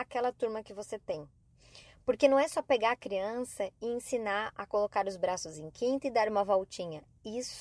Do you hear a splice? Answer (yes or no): no